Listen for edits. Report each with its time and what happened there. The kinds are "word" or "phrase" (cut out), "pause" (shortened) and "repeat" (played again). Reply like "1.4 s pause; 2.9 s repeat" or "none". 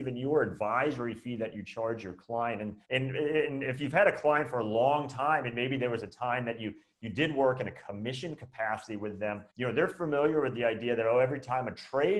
2.8 s pause; 9.5 s pause